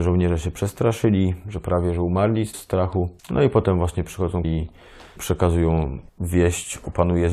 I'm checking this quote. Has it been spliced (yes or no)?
yes